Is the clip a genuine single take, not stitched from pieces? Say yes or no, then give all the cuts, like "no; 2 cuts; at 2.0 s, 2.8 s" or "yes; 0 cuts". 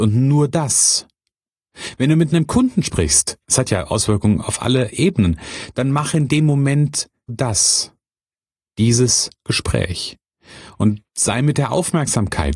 no; 3 cuts; at 3.4 s, 7.3 s, 11.0 s